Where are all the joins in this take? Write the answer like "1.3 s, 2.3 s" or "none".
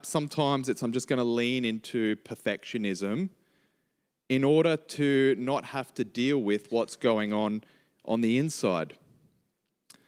none